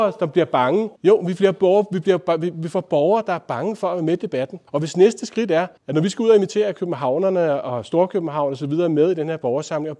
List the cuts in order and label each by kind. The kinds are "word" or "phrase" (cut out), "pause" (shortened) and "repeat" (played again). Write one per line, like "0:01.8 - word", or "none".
0:01.0 - pause
0:04.7 - pause
0:05.8 - pause